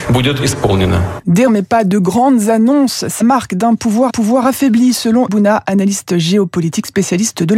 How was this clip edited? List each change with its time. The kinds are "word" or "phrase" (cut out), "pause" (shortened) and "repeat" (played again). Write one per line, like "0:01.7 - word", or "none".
0:01.5 - word
0:03.2 - word
0:04.1 - repeat
0:05.3 - word